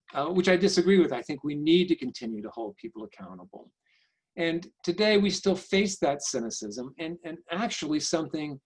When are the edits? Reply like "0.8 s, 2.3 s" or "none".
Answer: none